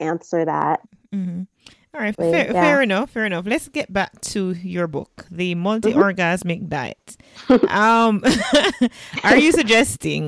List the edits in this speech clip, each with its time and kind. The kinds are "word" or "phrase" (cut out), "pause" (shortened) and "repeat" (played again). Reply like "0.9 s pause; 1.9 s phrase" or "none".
2.1 s word